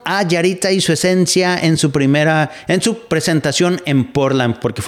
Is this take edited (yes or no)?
no